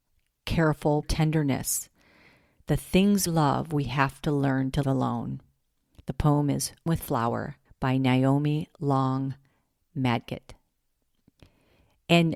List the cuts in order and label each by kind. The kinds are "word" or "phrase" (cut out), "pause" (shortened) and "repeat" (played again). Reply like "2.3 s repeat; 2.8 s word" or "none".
1.0 s phrase; 3.3 s word; 4.8 s word; 6.9 s word; 7.7 s pause